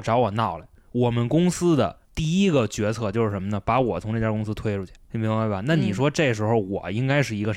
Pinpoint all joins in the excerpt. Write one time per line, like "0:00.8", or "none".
0:02.0